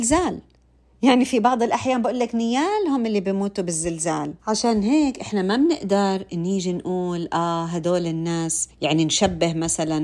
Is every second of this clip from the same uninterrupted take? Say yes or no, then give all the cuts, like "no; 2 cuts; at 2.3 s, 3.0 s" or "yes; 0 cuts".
no; 2 cuts; at 4.4 s, 8.7 s